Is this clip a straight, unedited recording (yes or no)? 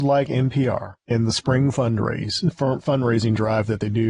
no